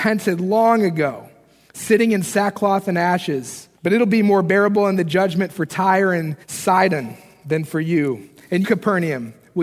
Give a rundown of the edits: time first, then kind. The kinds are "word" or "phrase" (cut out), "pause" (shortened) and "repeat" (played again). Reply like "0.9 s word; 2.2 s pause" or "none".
3.8 s pause; 6.4 s pause; 8.6 s word

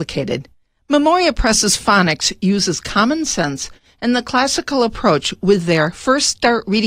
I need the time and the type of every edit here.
none

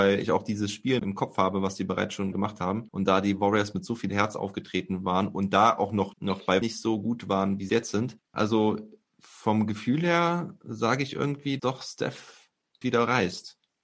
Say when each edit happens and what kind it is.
1.0 s word; 2.3 s word; 6.1 s word; 6.6 s word; 7.7 s word; 11.6 s word; 12.8 s word

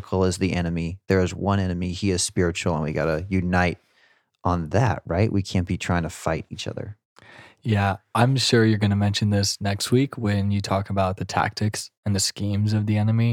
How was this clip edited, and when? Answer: none

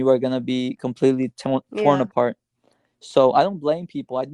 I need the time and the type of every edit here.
none

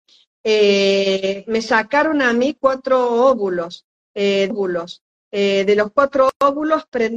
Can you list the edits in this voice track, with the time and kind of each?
4.5 s repeat

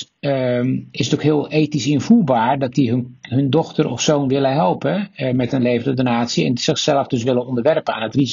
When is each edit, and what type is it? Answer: none

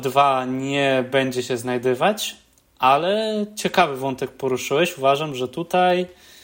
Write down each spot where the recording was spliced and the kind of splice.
none

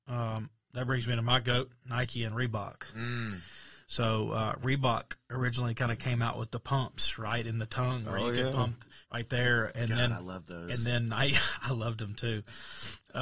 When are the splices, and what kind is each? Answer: 9.0 s pause

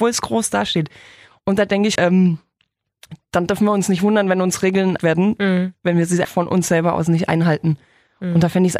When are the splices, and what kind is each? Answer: 2.0 s word; 5.0 s word; 6.2 s word

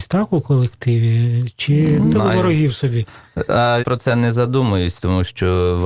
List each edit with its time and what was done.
2.1 s word; 3.8 s word

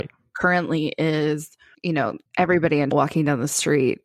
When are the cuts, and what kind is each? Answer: 1.7 s pause; 2.3 s pause; 2.9 s word

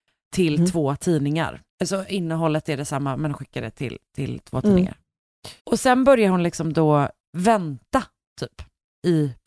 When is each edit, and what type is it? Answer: 1.7 s pause; 5.6 s pause

